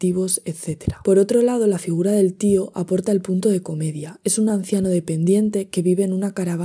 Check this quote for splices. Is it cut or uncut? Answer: uncut